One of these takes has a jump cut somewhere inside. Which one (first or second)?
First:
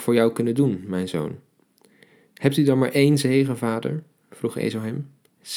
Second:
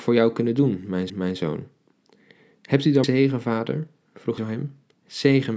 second